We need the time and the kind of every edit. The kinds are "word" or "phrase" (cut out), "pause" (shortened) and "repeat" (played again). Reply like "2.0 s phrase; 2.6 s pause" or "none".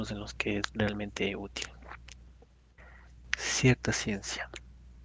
none